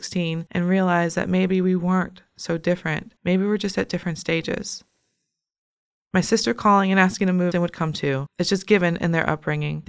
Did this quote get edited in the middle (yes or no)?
yes